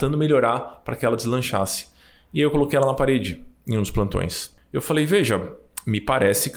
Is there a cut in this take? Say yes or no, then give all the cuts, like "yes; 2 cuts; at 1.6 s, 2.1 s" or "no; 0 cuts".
no; 0 cuts